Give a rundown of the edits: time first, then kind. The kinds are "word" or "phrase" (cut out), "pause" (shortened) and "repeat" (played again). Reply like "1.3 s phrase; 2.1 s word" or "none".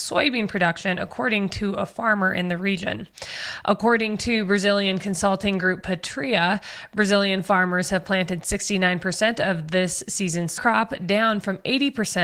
10.6 s word